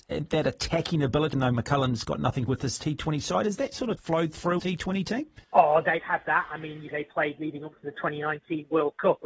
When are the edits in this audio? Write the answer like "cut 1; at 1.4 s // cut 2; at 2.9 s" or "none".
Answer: cut 1; at 1.3 s // cut 2; at 2.5 s // cut 3; at 4.0 s // cut 4; at 4.6 s // cut 5; at 5.4 s // cut 6; at 6.0 s // cut 7; at 6.9 s